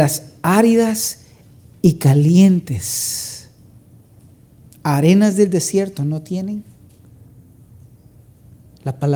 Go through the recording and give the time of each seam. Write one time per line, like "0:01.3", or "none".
none